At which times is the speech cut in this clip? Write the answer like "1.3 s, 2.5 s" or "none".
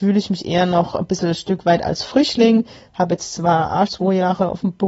3.9 s